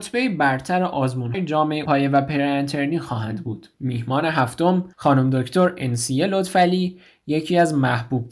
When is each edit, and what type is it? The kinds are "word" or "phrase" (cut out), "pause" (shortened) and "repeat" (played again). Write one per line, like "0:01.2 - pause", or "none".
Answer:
0:01.3 - word
0:01.9 - word
0:03.7 - pause
0:04.9 - pause